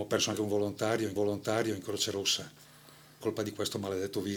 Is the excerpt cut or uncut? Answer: cut